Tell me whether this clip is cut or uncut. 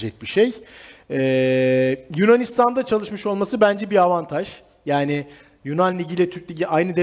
uncut